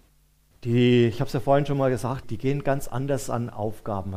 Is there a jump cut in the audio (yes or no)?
yes